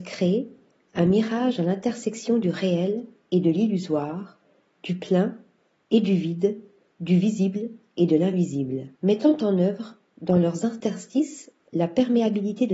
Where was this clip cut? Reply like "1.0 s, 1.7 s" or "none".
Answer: 8.9 s

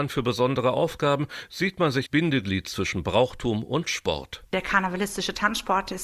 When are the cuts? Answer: 2.1 s

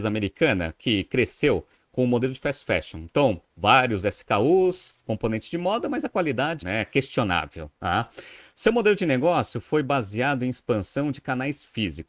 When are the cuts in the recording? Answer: 5.0 s, 6.6 s

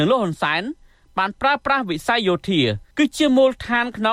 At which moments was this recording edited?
2.9 s

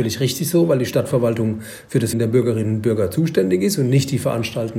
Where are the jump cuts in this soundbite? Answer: 2.1 s

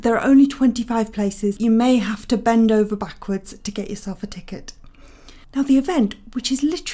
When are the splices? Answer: 1.6 s

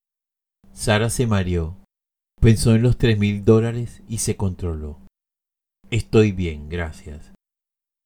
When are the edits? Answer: none

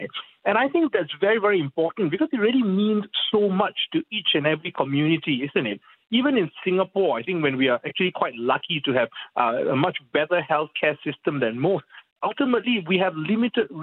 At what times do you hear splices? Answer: none

